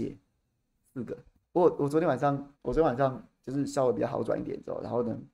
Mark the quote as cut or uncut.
cut